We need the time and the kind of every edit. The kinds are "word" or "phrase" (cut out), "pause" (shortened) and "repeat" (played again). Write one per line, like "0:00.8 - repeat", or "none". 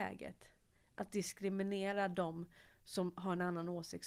none